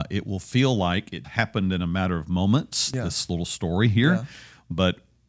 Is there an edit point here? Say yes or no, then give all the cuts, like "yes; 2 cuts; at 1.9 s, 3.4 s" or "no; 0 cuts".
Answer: yes; 1 cut; at 1.2 s